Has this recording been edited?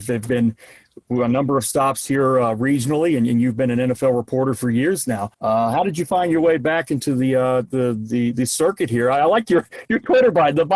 yes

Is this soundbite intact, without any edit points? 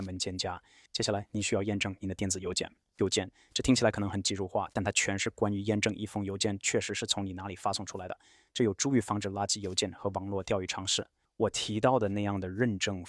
yes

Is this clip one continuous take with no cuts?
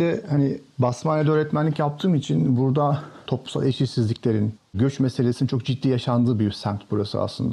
yes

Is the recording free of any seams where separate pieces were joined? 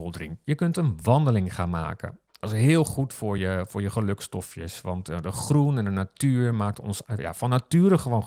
yes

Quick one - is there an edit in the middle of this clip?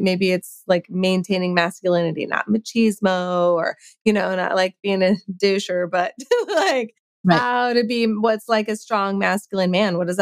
no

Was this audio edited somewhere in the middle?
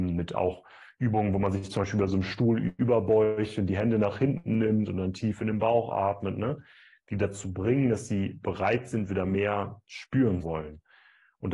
yes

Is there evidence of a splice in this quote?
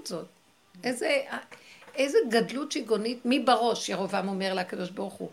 no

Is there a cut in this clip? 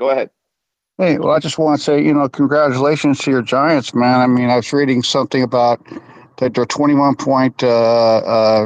no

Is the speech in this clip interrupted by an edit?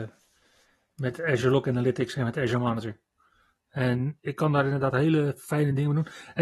no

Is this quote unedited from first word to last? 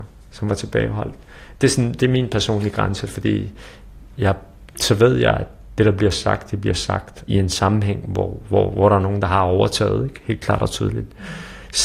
yes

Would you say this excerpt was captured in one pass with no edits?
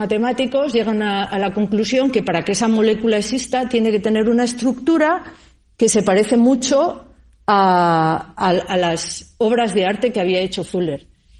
yes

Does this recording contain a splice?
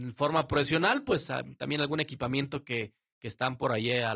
no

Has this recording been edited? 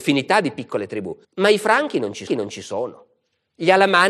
yes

